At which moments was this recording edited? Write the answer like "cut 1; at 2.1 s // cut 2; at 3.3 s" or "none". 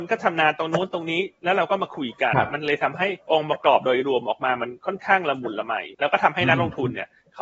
cut 1; at 3.2 s // cut 2; at 5.9 s